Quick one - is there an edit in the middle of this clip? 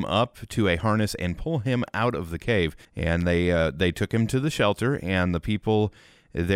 yes; 1 cut; at 2.8 s

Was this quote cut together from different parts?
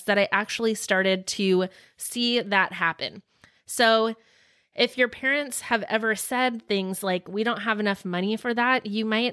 no; 0 cuts

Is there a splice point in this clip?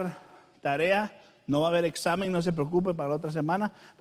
no; 0 cuts

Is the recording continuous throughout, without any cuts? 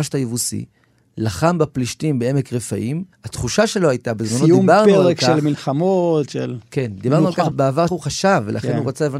no; 3 cuts; at 3.1 s, 7.5 s, 7.9 s

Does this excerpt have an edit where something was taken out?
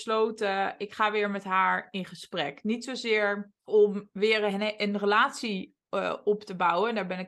yes; 1 cut; at 3.6 s

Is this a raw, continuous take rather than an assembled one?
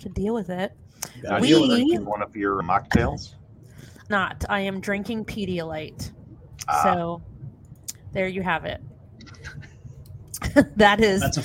no; 2 cuts; at 2.6 s, 4.1 s

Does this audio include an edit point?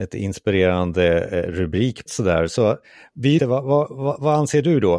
yes; 2 cuts; at 2.1 s, 3.4 s

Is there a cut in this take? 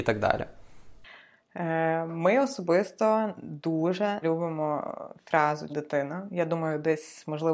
yes; 2 cuts; at 4.2 s, 5.7 s

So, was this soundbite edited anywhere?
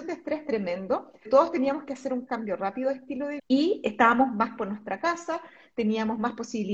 yes; 3 cuts; at 1.3 s, 3.4 s, 4.6 s

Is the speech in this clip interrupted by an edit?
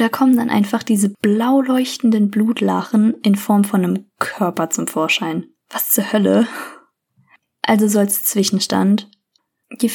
no; 0 cuts

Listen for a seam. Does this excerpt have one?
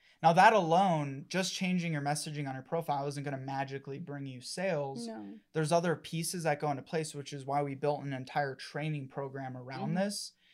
no; 0 cuts

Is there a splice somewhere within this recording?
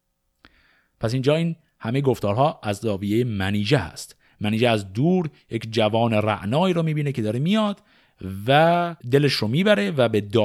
yes; 1 cut; at 9.0 s

